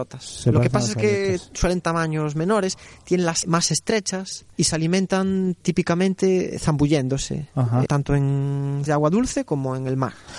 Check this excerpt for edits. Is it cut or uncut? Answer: cut